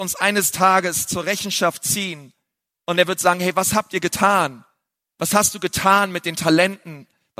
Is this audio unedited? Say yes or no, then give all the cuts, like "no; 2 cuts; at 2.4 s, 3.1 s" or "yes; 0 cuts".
yes; 0 cuts